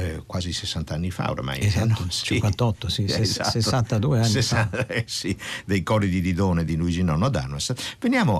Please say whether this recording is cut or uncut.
uncut